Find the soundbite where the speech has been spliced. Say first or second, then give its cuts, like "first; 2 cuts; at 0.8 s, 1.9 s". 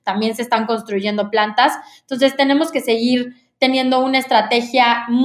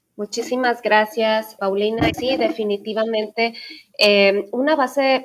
second; 2 cuts; at 1.6 s, 2.1 s